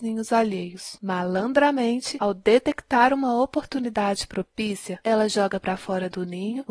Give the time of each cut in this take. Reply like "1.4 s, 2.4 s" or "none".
none